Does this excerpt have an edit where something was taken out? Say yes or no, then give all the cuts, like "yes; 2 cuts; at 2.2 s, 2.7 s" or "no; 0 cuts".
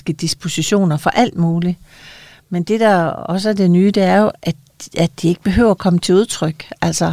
no; 0 cuts